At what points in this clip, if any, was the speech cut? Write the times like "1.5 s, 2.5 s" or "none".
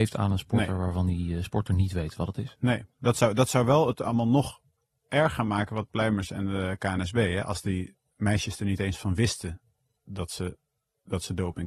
5.9 s